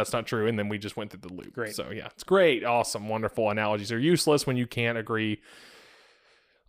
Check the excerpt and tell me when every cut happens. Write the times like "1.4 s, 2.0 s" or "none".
none